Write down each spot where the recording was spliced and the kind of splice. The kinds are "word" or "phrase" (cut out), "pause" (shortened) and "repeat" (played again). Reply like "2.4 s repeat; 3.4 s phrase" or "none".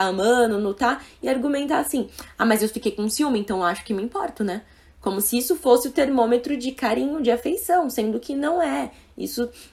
none